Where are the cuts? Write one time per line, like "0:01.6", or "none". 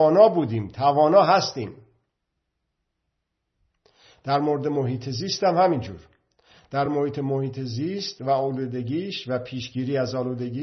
none